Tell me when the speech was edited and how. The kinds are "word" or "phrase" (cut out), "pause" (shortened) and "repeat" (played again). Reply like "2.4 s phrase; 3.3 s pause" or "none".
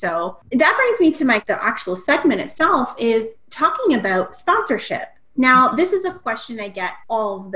none